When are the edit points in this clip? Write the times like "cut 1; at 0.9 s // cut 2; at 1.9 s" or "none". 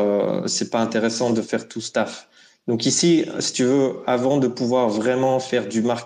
none